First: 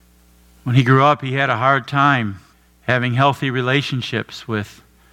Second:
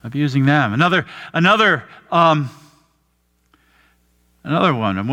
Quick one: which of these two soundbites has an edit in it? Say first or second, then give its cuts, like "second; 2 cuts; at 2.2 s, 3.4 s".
first; 1 cut; at 2.5 s